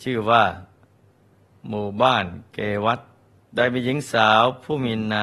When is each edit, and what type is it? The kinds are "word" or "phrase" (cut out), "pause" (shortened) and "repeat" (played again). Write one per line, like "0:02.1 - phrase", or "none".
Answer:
0:03.3 - pause